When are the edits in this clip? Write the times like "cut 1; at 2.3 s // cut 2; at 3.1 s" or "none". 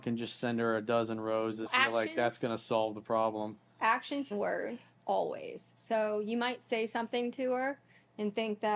cut 1; at 1.7 s // cut 2; at 4.3 s